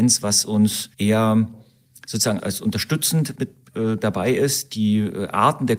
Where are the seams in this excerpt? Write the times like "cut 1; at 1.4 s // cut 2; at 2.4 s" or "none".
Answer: cut 1; at 0.9 s // cut 2; at 2.4 s // cut 3; at 3.4 s